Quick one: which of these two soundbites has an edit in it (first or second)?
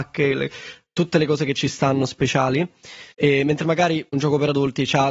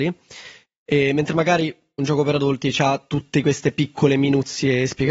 first